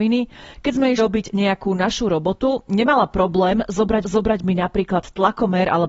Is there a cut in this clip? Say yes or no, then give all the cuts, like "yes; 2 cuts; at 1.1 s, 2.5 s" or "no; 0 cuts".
yes; 2 cuts; at 1.0 s, 4.0 s